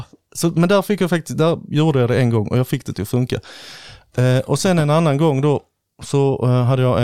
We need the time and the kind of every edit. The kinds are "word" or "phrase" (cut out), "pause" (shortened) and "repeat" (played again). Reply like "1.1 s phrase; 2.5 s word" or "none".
none